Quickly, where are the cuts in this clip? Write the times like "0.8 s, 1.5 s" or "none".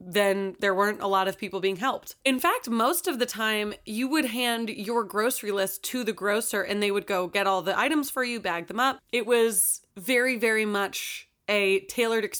2.2 s, 9.9 s